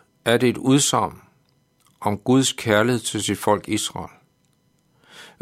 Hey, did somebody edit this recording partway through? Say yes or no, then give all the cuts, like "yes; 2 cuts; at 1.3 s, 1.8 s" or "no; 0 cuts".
no; 0 cuts